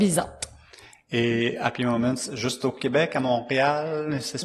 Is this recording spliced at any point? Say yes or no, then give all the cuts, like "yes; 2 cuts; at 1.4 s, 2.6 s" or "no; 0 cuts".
no; 0 cuts